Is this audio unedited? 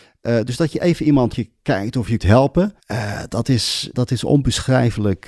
no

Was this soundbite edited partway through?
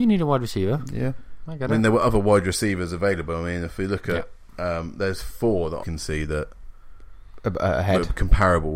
yes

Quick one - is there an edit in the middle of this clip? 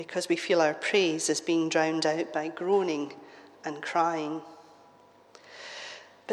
no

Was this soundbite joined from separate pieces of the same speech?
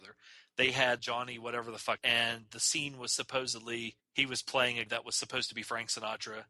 yes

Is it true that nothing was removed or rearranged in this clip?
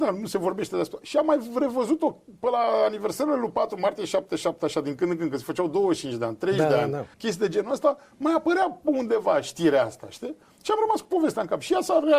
no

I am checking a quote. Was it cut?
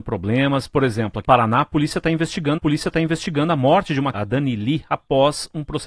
yes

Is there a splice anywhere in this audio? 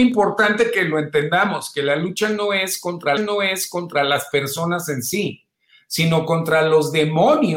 yes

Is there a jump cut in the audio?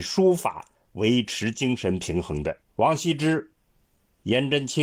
yes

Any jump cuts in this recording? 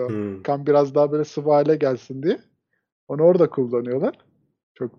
no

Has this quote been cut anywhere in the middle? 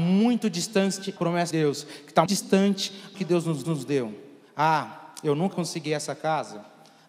yes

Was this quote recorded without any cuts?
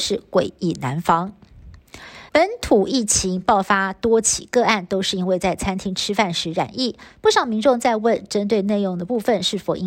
no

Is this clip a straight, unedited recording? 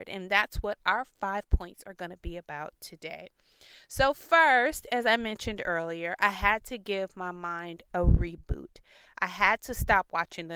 yes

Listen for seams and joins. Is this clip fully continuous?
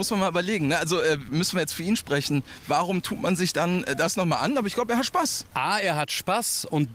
yes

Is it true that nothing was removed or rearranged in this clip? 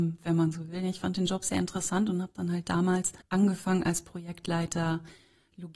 no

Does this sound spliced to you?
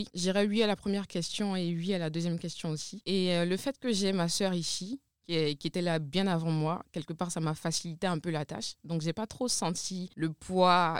no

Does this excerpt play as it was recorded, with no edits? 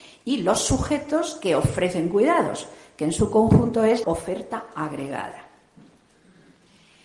no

